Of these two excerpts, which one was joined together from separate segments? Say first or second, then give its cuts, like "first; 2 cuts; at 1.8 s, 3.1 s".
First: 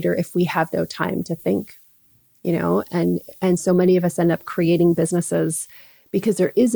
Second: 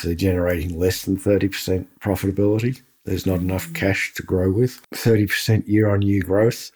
second; 1 cut; at 4.8 s